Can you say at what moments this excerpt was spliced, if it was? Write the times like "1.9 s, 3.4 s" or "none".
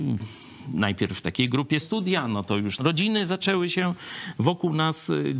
1.8 s, 2.8 s